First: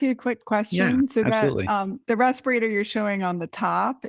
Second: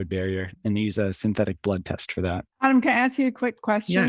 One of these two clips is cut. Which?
second; 1 cut; at 2.5 s

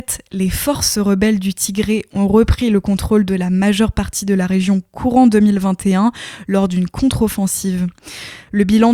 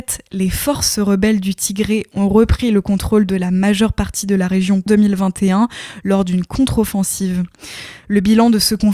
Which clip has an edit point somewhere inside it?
second; 1 cut; at 4.9 s

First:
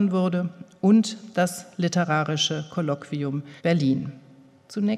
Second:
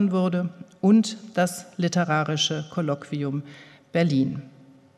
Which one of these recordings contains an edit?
first; 1 cut; at 3.6 s

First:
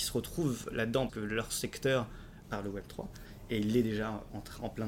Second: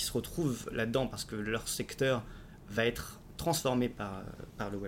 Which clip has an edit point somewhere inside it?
first; 2 cuts; at 1.1 s, 2.4 s

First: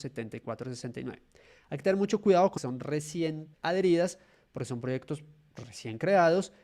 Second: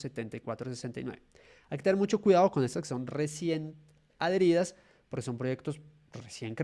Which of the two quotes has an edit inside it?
first; 2 cuts; at 2.6 s, 3.5 s

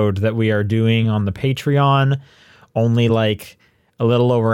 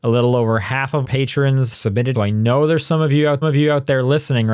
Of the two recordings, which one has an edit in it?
second; 4 cuts; at 1.0 s, 1.7 s, 2.1 s, 3.4 s

